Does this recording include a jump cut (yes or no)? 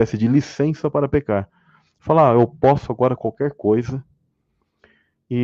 no